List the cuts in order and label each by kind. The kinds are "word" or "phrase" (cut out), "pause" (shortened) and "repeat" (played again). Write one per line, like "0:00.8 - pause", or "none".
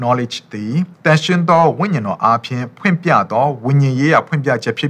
0:00.9 - pause